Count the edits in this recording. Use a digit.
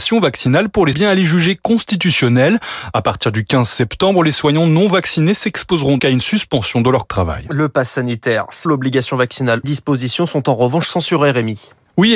5